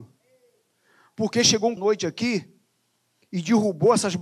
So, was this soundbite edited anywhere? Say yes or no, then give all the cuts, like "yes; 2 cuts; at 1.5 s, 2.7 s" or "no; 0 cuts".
yes; 1 cut; at 1.8 s